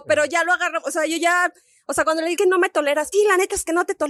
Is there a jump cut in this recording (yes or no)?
yes